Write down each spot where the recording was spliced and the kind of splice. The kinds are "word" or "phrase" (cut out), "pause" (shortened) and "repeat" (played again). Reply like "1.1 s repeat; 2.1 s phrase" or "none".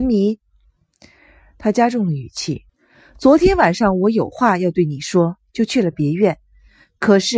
2.7 s pause